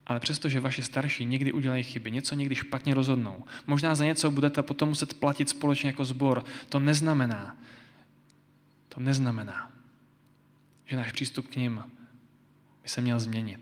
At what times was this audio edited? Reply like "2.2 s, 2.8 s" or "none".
none